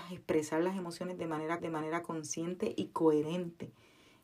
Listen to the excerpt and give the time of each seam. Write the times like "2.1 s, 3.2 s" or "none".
1.6 s